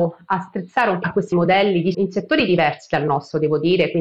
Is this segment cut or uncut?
cut